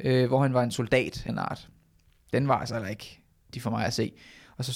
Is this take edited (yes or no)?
yes